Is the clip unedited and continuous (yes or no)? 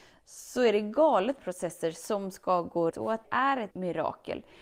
no